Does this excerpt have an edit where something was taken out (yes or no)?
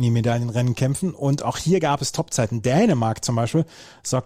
no